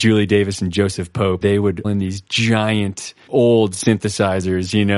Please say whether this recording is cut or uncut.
cut